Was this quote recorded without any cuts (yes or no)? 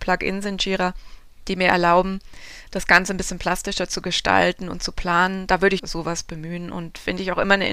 no